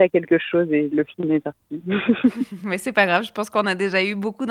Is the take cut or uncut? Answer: uncut